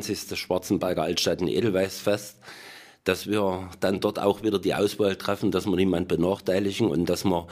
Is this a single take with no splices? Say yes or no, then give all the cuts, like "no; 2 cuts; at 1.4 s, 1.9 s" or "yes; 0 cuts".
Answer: yes; 0 cuts